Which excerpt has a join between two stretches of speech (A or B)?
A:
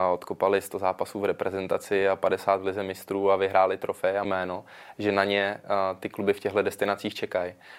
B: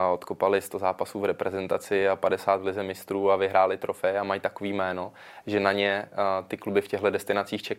A